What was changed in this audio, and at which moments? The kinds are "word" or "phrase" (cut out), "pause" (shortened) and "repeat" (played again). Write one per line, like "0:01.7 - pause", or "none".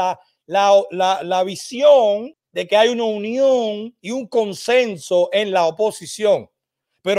0:04.0 - pause